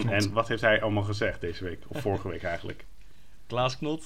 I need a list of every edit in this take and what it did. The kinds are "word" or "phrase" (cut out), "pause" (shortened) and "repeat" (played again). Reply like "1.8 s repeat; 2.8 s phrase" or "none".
none

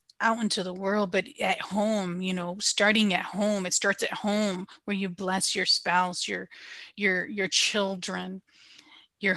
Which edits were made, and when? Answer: none

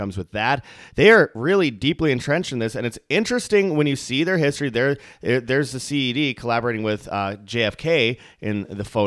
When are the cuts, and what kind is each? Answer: none

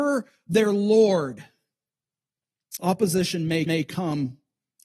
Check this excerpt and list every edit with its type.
3.7 s repeat

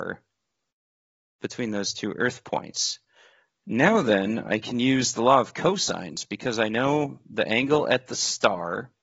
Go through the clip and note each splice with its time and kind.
none

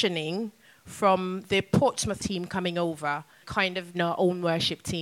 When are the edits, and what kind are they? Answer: 2.2 s word; 3.4 s word; 3.9 s word

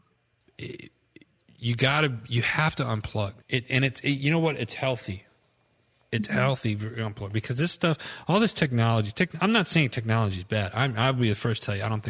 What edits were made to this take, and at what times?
3.4 s pause

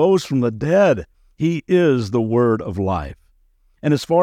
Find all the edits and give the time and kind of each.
none

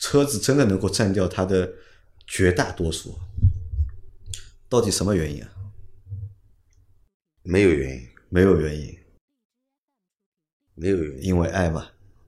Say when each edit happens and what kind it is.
none

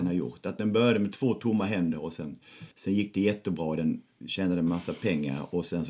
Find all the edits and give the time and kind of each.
2.7 s pause

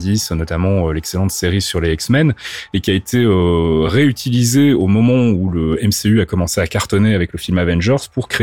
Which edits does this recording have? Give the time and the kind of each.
none

